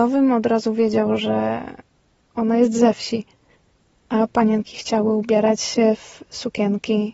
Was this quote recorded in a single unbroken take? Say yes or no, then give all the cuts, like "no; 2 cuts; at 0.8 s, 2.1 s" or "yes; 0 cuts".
yes; 0 cuts